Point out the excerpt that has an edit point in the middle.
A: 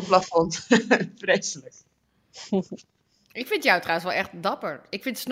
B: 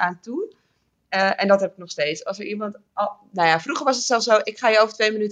B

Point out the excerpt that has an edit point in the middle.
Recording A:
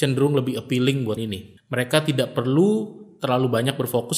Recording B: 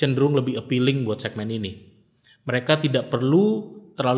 A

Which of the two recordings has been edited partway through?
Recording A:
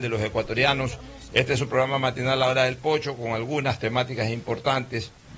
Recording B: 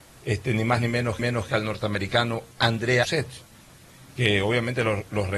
B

